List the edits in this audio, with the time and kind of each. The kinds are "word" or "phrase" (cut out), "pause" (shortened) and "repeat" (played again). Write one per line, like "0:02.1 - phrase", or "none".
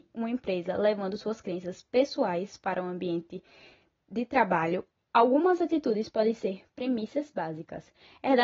none